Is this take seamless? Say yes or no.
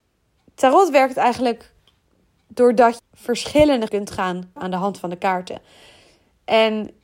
no